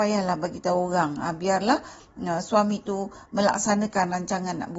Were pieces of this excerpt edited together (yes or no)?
no